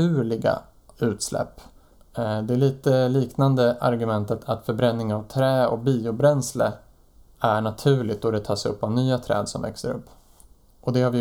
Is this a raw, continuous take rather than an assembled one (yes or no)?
yes